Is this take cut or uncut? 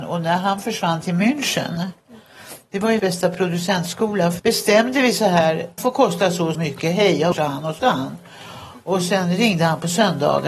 cut